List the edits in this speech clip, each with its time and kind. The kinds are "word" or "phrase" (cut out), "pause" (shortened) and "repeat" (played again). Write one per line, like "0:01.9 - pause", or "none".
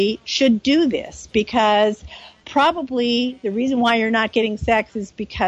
none